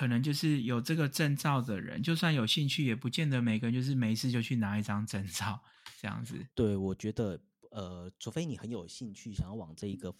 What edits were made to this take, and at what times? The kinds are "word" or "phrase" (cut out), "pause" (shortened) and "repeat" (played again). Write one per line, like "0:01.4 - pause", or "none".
0:06.5 - pause